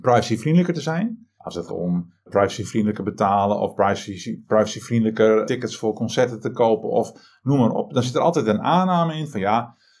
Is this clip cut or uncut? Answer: cut